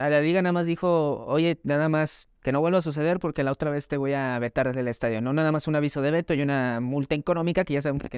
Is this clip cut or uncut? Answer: uncut